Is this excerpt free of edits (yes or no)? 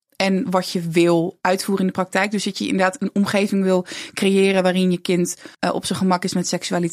no